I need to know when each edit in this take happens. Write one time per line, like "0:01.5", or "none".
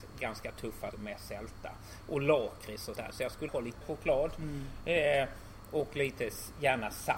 0:00.9
0:02.9
0:03.5
0:03.8